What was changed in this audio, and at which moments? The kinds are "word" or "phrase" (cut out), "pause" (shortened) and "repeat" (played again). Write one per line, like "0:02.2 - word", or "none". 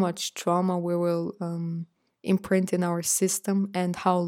0:02.1 - pause